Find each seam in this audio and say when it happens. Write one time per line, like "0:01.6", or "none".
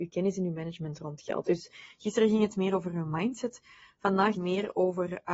0:04.3